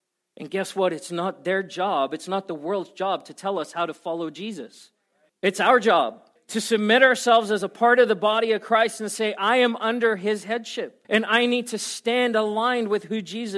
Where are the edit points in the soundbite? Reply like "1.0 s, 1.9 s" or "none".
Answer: 5.3 s, 6.4 s, 11.0 s